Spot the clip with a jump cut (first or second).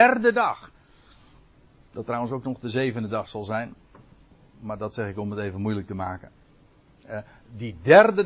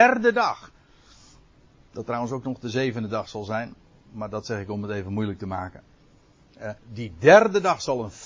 second